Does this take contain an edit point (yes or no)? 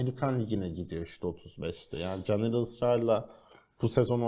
no